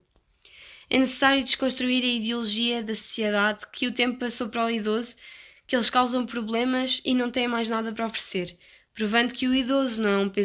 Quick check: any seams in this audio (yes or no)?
no